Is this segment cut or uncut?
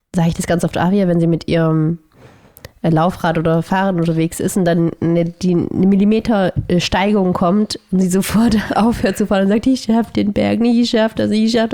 uncut